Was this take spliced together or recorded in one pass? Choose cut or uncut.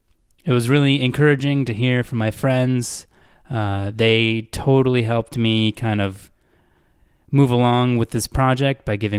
uncut